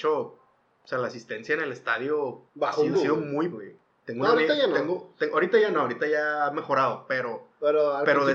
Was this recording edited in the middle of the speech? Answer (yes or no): yes